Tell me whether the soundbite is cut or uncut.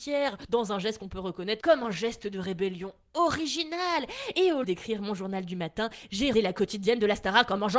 cut